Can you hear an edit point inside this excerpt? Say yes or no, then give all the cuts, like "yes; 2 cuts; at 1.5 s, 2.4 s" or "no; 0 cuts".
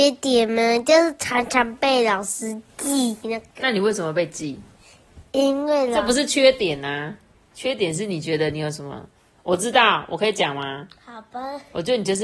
no; 0 cuts